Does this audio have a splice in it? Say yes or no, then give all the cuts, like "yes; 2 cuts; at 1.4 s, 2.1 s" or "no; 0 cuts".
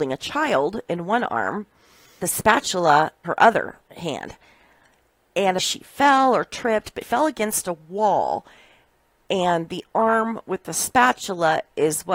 yes; 4 cuts; at 2.2 s, 3.2 s, 5.6 s, 7.0 s